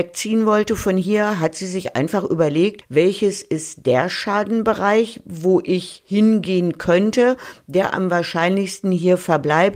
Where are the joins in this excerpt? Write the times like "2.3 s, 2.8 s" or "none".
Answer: none